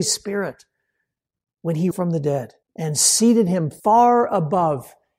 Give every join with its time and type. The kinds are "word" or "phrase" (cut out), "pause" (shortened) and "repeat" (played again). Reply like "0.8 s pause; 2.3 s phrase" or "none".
1.9 s phrase; 2.6 s pause; 3.8 s pause